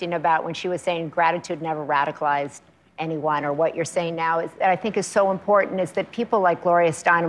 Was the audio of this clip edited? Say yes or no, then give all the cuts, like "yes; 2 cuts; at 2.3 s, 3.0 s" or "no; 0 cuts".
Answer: no; 0 cuts